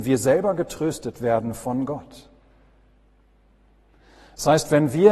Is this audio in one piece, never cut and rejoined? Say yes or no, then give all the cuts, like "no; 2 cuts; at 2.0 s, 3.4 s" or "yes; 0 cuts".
yes; 0 cuts